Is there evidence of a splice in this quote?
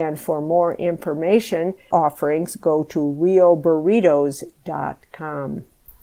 yes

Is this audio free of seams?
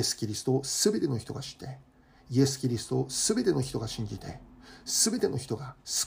yes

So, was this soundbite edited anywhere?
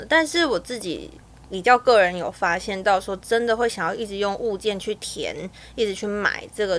no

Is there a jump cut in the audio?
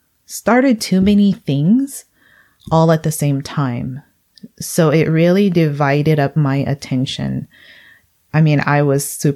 no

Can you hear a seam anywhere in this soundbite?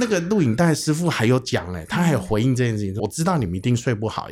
yes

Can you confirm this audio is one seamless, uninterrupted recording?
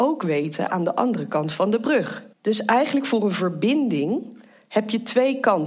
no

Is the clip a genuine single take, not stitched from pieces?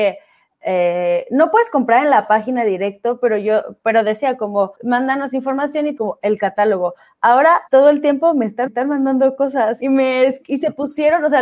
no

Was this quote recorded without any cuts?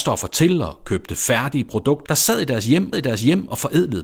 no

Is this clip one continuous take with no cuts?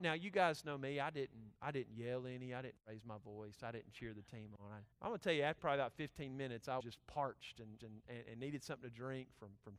no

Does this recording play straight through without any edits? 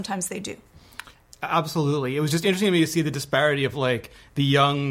yes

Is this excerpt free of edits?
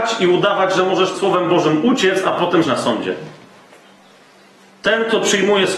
no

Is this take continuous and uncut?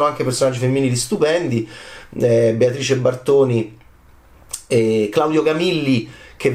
yes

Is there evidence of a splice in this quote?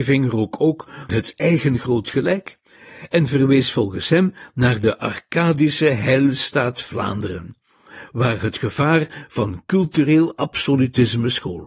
yes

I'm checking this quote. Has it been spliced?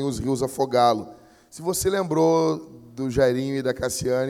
no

